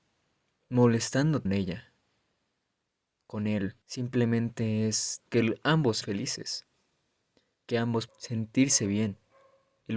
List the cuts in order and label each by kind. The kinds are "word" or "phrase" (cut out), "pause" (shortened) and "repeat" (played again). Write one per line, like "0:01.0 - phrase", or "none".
0:01.5 - word
0:03.8 - pause
0:05.2 - word
0:06.0 - word
0:08.1 - word

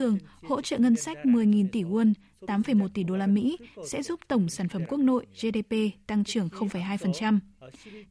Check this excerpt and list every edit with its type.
none

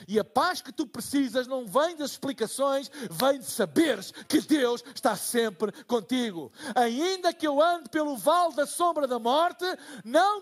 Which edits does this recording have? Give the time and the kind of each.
none

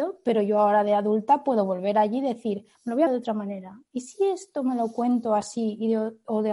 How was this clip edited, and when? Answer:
0:02.7 - pause
0:03.1 - word

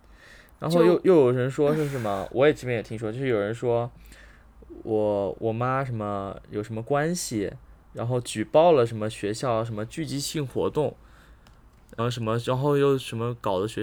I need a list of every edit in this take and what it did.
0:07.8 - pause
0:12.0 - word

